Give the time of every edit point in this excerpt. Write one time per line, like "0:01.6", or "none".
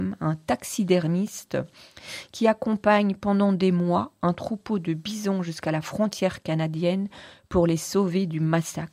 none